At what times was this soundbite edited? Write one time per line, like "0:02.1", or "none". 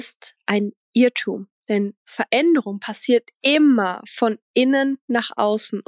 0:03.3

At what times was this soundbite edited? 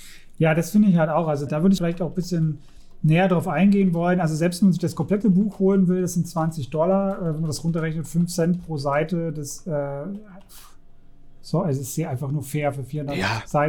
0:01.5
0:01.8

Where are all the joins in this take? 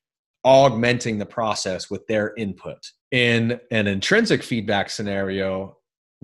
0:03.0

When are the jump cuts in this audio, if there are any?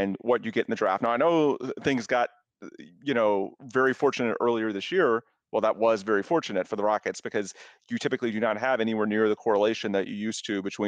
none

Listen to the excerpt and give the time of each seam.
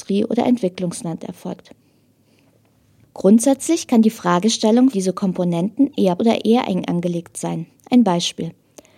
0:04.9
0:06.2

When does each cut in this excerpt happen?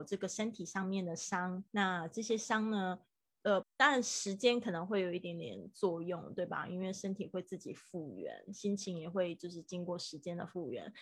0:01.7
0:03.6

